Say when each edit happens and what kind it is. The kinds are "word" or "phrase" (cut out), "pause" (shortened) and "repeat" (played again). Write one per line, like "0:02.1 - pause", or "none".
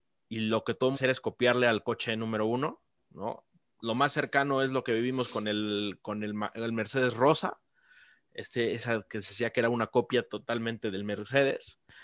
0:00.9 - phrase